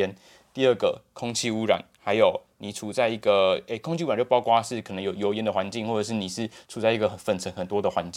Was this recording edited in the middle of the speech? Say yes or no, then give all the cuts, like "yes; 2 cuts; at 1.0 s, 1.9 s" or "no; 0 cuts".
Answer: no; 0 cuts